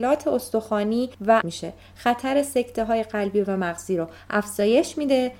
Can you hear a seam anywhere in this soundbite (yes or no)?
yes